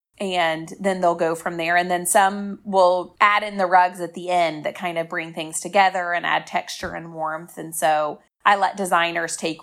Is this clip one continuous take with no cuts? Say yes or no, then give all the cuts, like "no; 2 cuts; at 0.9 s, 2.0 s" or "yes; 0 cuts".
yes; 0 cuts